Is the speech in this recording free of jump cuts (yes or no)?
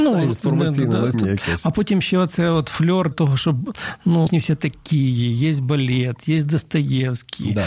no